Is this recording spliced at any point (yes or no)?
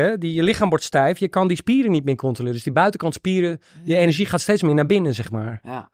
no